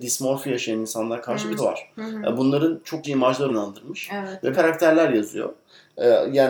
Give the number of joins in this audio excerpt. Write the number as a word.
four